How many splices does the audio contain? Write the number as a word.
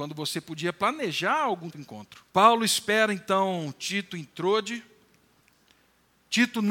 two